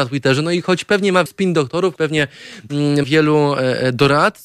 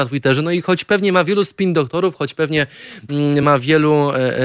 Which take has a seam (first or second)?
first